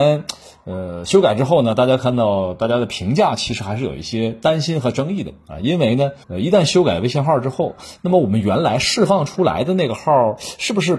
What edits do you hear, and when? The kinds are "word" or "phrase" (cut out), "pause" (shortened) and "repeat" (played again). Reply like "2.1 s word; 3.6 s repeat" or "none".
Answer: 6.2 s pause